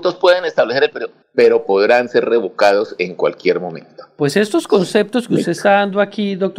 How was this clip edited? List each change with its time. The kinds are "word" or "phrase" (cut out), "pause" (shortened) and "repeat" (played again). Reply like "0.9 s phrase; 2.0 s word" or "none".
none